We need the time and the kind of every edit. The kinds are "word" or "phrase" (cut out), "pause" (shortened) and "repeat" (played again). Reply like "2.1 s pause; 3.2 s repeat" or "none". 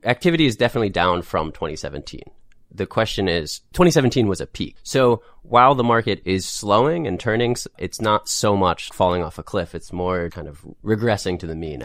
8.9 s word; 10.3 s word